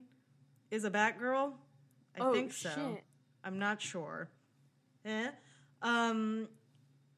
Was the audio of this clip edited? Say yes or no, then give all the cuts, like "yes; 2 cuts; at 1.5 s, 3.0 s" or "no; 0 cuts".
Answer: no; 0 cuts